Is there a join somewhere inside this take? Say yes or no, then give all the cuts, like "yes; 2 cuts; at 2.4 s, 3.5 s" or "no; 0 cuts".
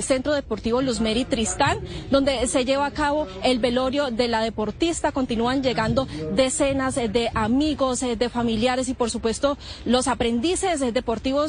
no; 0 cuts